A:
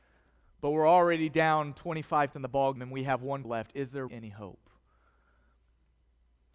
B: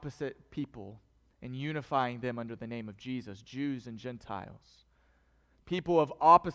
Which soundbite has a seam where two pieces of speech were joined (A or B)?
A